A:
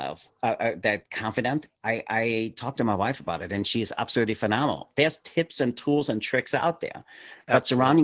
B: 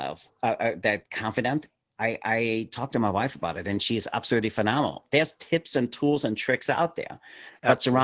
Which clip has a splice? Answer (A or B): A